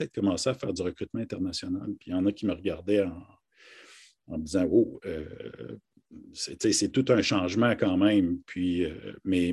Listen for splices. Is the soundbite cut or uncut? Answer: uncut